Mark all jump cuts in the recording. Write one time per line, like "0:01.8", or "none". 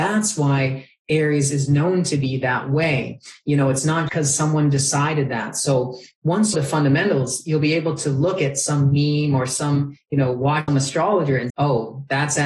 0:04.1
0:06.5
0:10.7
0:11.5